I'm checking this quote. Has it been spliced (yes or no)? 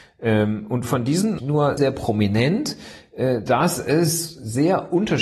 yes